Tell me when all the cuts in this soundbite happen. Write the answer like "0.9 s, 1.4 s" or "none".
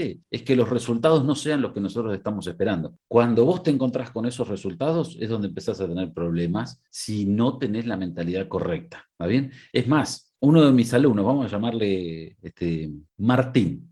6.9 s

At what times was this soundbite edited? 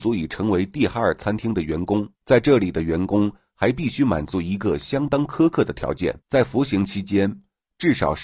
2.1 s, 6.2 s

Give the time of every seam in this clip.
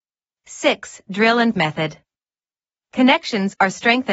1.5 s

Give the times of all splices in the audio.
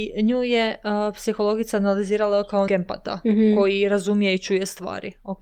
2.7 s

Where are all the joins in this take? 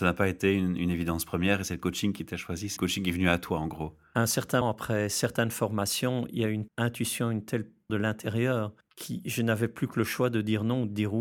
2.8 s, 4.6 s, 6.7 s, 7.9 s

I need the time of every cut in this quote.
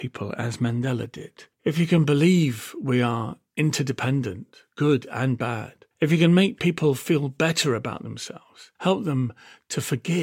1.5 s, 5.9 s, 8.8 s

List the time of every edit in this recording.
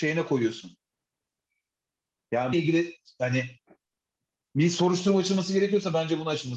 2.5 s

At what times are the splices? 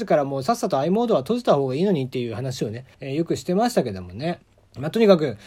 2.9 s, 4.5 s

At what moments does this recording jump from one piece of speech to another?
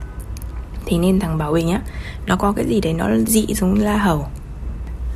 2.4 s, 3.3 s

